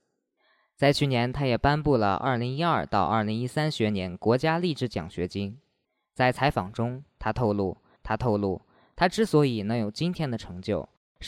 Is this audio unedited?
no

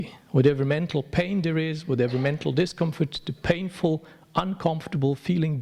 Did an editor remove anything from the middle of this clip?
no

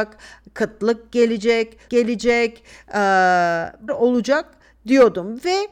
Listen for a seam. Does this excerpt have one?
yes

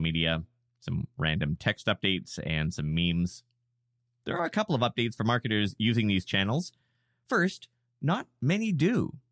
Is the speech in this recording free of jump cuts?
yes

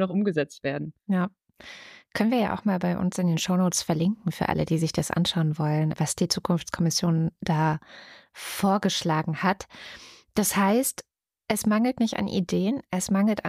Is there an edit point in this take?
no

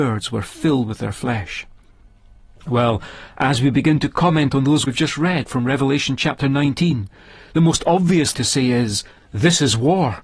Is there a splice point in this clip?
yes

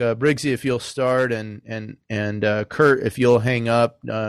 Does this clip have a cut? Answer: no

